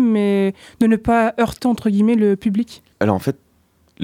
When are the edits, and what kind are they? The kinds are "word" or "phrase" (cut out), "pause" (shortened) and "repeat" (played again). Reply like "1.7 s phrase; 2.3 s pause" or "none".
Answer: 2.9 s pause